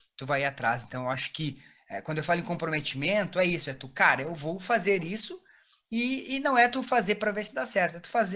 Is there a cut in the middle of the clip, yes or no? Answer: no